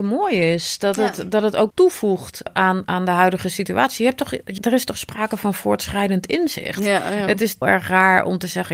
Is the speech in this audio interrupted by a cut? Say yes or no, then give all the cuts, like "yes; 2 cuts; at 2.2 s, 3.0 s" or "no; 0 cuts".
yes; 5 cuts; at 1.7 s, 2.5 s, 2.8 s, 4.6 s, 7.6 s